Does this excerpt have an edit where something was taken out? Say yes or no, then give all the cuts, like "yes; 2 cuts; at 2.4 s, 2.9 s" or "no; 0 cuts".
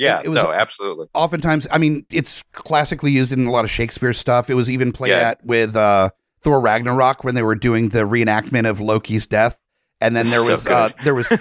yes; 2 cuts; at 2.1 s, 6.3 s